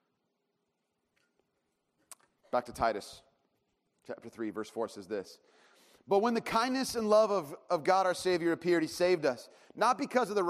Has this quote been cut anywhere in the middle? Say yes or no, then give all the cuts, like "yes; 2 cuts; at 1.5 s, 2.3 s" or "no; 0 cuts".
no; 0 cuts